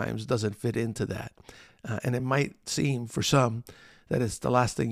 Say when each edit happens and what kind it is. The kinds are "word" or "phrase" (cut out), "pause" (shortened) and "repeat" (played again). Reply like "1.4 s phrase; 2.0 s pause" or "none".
none